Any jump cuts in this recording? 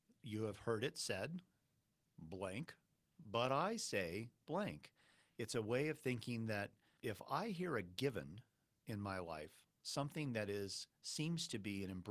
no; 0 cuts

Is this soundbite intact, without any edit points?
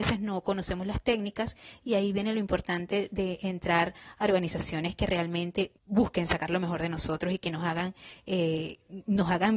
no; 1 cut; at 5.8 s

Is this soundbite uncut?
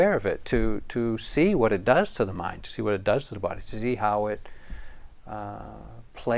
yes; 0 cuts

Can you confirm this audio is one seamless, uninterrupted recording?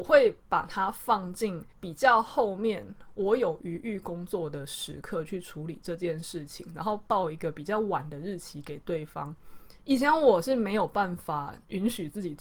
no; 2 cuts; at 1.7 s, 9.8 s

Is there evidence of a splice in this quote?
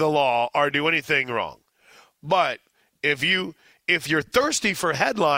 no; 0 cuts

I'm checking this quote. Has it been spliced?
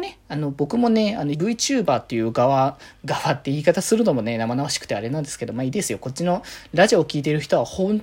yes; 1 cut; at 1.3 s

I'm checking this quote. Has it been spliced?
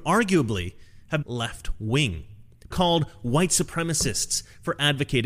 yes; 2 cuts; at 1.2 s, 2.7 s

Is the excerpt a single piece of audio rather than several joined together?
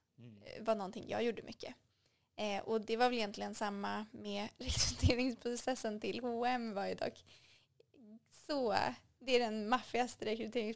yes; 0 cuts

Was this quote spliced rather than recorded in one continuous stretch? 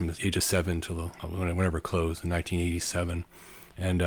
no; 0 cuts

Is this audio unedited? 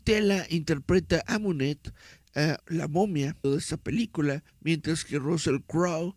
no; 4 cuts; at 1.2 s, 2.6 s, 3.4 s, 4.5 s

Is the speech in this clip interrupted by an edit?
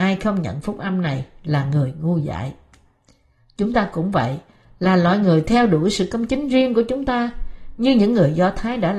no; 0 cuts

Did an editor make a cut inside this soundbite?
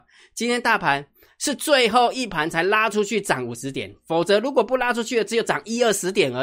no; 0 cuts

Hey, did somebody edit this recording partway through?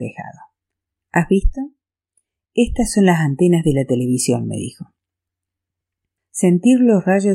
no; 0 cuts

